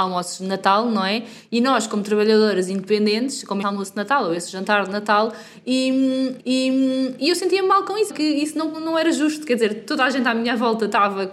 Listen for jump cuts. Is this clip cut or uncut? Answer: cut